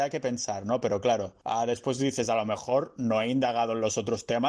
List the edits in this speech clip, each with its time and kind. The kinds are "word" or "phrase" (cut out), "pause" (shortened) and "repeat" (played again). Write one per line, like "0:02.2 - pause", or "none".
0:01.4 - pause